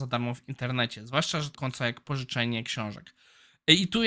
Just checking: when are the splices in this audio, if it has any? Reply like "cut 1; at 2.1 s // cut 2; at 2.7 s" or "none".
cut 1; at 1.5 s